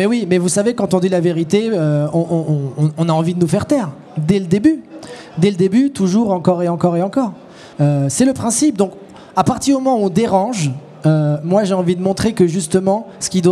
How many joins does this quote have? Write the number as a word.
one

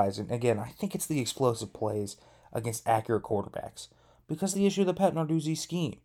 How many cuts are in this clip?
one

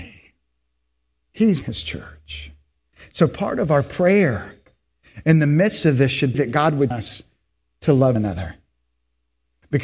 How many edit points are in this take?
four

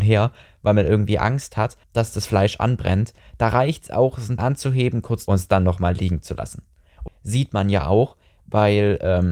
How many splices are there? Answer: four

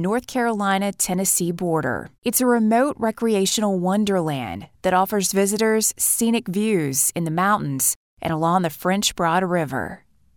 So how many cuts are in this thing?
one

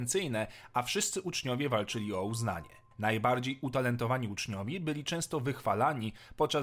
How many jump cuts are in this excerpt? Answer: one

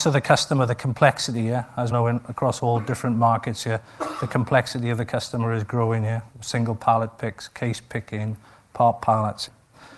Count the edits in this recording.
one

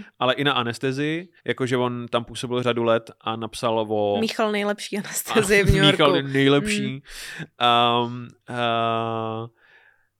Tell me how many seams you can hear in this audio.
one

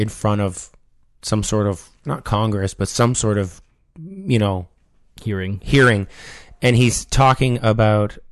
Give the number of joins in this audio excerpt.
zero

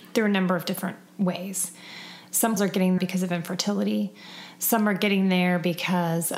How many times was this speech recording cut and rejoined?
two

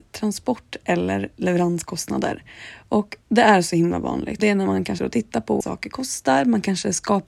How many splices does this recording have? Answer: four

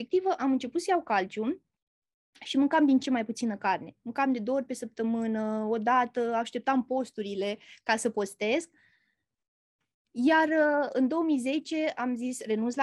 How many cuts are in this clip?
one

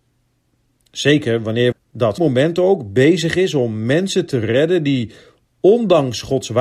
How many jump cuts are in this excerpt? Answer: two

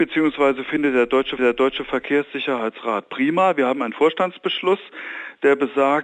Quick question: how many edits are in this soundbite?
one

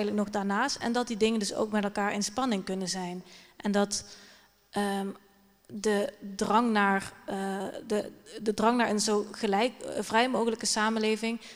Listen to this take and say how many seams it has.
zero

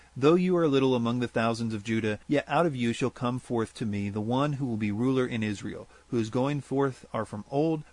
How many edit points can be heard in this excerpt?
one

